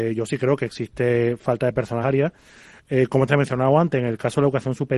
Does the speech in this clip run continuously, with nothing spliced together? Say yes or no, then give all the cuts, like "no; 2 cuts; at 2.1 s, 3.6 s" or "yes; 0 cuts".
no; 2 cuts; at 2.0 s, 3.3 s